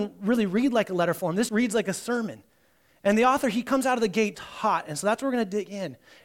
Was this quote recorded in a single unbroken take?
no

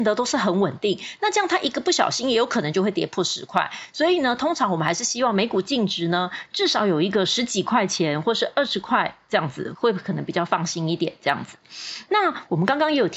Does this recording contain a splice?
no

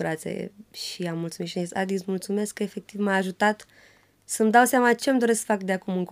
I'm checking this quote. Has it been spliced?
no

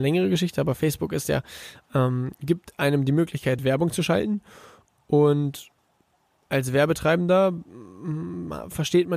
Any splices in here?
no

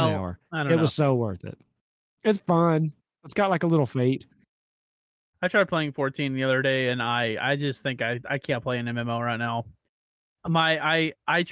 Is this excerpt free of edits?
yes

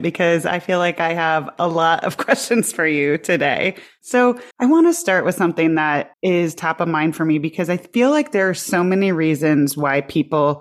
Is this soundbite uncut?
no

